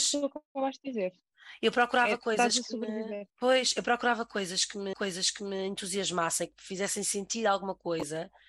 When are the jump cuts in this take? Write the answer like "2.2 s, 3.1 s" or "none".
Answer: 3.3 s, 4.9 s

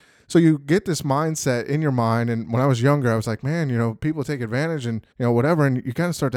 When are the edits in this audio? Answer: 5.1 s

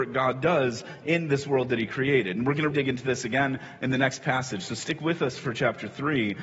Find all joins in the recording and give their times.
2.7 s

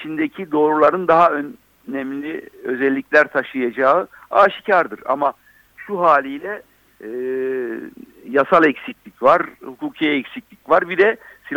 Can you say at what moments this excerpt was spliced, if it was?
none

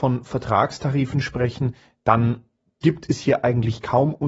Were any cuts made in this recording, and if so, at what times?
2.6 s

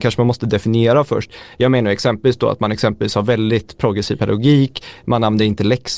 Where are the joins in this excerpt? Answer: none

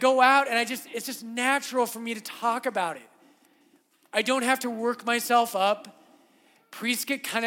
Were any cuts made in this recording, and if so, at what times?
none

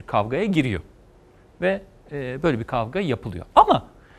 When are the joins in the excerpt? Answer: none

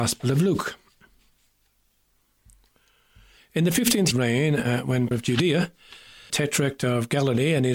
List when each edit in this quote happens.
4.1 s, 5.1 s, 6.3 s

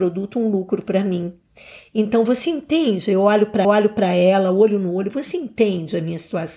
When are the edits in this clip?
3.6 s

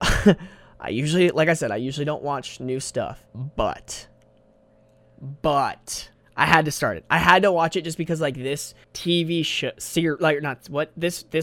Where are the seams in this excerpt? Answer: 3.3 s, 6.1 s, 8.8 s

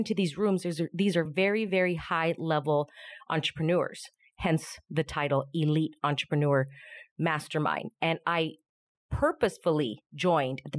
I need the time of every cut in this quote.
none

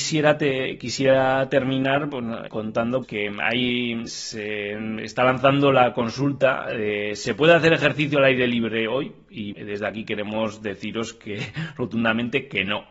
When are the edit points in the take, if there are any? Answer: 2.5 s, 3.0 s, 4.1 s, 9.5 s

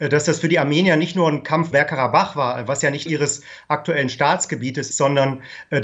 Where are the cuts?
1.7 s, 3.1 s, 4.9 s

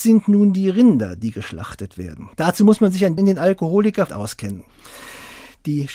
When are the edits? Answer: 2.3 s, 3.2 s, 4.1 s

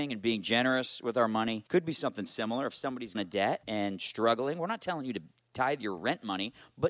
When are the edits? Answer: 1.7 s, 3.1 s, 3.6 s

